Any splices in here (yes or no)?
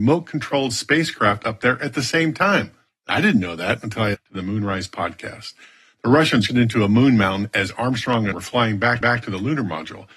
yes